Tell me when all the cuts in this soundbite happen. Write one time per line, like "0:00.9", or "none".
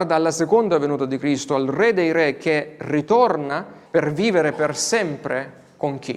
0:03.9